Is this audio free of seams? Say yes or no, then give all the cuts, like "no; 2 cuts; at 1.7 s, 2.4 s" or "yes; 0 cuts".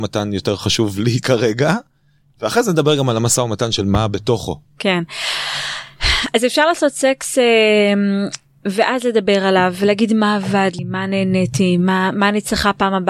yes; 0 cuts